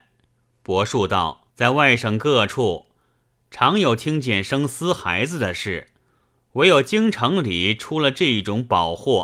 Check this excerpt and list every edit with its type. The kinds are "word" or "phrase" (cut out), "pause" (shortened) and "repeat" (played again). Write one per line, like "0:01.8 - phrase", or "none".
0:01.5 - pause